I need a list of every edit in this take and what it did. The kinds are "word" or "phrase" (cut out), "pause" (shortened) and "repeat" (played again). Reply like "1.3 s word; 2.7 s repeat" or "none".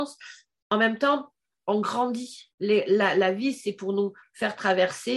1.4 s pause; 2.5 s pause